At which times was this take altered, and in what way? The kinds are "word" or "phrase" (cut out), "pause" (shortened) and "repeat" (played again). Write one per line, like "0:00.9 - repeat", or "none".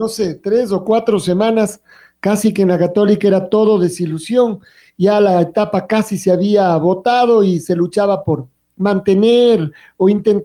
none